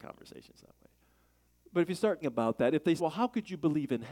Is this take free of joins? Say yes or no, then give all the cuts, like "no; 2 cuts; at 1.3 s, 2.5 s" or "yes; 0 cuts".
no; 2 cuts; at 2.2 s, 3.0 s